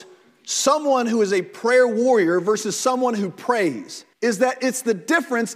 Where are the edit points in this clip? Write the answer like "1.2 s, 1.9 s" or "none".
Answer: 4.1 s